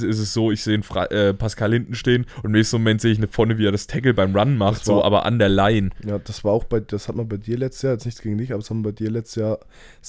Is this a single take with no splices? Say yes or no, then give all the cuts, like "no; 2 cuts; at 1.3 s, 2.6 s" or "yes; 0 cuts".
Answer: no; 1 cut; at 2.3 s